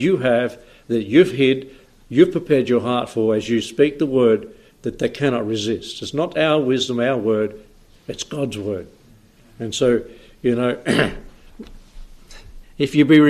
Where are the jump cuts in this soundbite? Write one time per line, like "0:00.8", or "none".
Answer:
none